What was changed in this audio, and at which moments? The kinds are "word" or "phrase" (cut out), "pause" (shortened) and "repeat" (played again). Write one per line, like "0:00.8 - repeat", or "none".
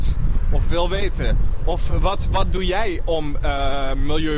none